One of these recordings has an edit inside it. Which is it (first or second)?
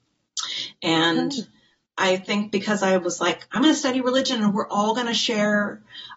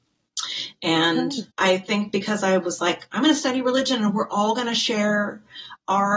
second